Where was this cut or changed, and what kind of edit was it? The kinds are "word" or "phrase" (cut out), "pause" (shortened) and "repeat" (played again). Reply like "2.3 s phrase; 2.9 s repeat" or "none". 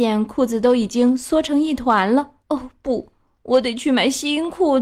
2.4 s pause